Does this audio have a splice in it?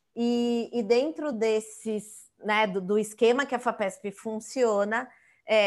no; 0 cuts

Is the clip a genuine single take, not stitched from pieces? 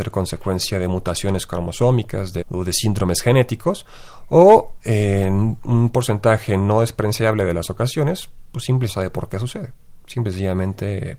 no; 2 cuts; at 2.4 s, 8.9 s

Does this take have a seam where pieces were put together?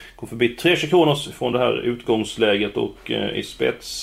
no; 0 cuts

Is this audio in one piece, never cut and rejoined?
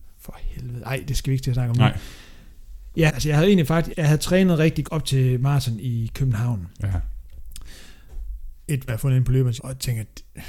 no; 5 cuts; at 3.1 s, 3.9 s, 4.8 s, 8.9 s, 9.6 s

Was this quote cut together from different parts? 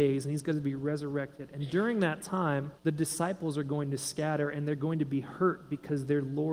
yes; 1 cut; at 2.8 s

